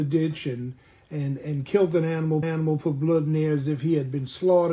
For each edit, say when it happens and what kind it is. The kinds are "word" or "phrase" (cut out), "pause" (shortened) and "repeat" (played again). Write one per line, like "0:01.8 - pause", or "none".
0:02.4 - repeat

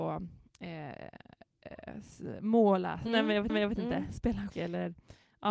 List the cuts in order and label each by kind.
0:03.5 - repeat
0:04.5 - word

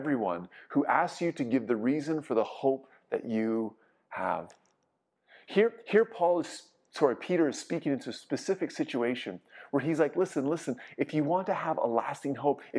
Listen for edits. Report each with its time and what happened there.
none

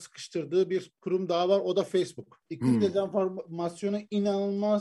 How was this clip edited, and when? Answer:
0:02.4 - pause

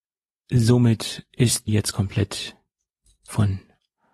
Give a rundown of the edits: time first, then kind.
0:01.7 - word

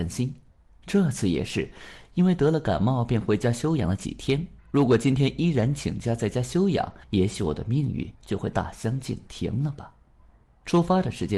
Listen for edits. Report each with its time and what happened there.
0:04.6 - pause
0:07.0 - pause
0:08.1 - pause
0:10.2 - pause

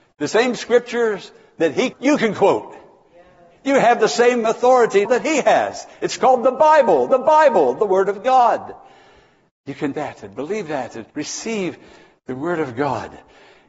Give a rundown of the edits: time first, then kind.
0:01.9 - word
0:05.1 - word
0:07.1 - repeat
0:09.9 - word
0:11.1 - pause

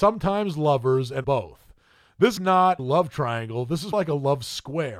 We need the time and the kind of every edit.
0:01.2 - word
0:02.4 - word
0:02.8 - word
0:03.9 - word

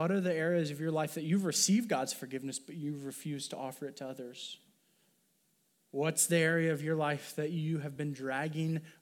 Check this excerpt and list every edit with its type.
none

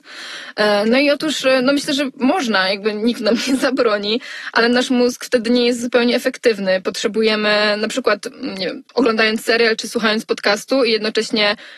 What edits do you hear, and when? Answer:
none

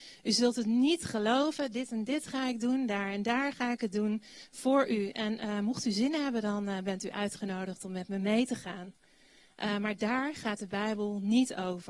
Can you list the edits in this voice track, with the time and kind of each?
none

